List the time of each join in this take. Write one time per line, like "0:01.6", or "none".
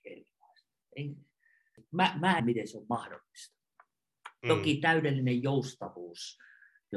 0:02.4